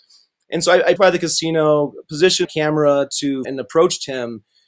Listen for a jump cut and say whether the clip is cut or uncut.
cut